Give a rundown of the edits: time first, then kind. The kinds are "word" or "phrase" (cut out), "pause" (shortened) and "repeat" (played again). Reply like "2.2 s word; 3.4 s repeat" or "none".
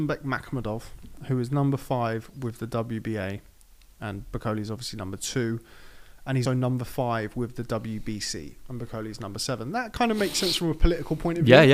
6.4 s word